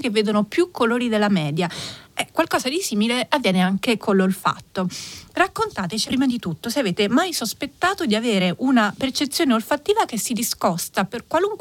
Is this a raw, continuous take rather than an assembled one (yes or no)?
no